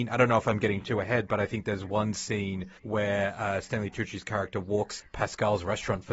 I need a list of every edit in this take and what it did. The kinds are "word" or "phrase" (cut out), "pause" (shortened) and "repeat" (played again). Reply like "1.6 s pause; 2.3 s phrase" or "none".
2.8 s pause; 5.0 s word